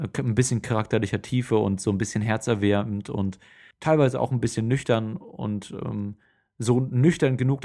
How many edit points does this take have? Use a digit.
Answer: 0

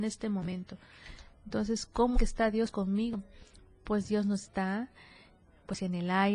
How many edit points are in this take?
1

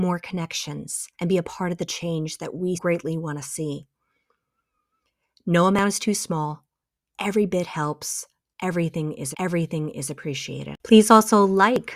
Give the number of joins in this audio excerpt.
3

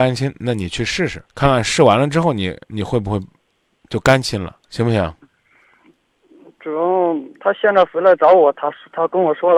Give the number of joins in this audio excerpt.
2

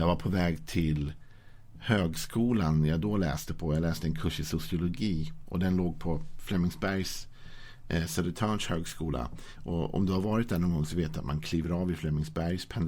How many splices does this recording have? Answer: 0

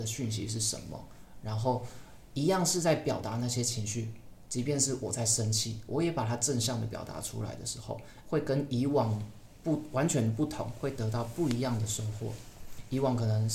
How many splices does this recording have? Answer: 1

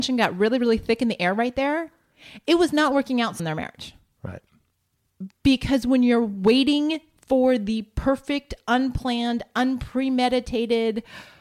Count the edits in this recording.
1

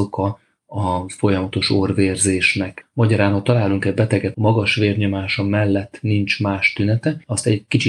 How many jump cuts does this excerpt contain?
1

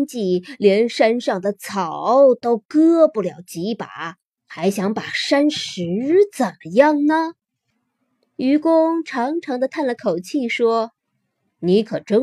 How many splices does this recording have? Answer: 2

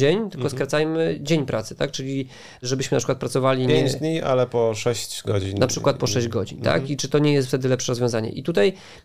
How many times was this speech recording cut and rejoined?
0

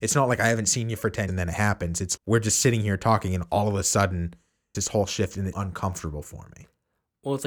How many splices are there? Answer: 4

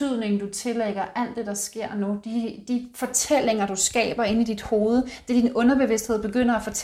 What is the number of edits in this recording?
0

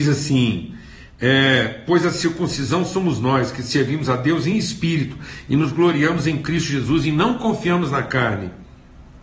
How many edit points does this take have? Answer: 0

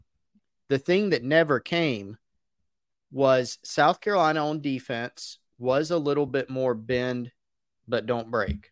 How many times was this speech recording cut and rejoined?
0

